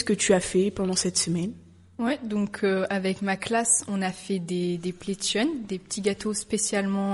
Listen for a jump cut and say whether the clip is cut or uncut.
uncut